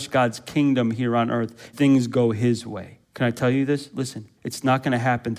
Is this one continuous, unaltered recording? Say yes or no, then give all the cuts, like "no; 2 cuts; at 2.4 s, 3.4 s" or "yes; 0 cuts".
no; 3 cuts; at 1.7 s, 3.0 s, 4.4 s